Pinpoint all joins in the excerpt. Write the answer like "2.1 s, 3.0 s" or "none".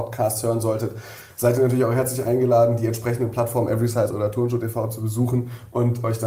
none